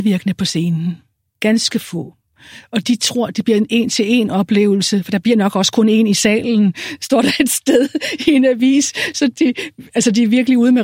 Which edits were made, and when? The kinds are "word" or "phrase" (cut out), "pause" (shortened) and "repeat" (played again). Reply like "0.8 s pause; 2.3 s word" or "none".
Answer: none